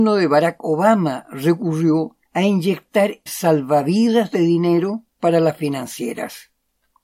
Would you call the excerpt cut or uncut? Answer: cut